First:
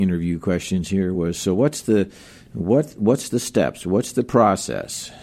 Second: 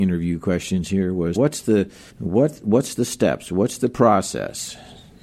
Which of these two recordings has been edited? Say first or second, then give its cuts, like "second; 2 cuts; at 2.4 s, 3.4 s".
second; 2 cuts; at 1.3 s, 2.1 s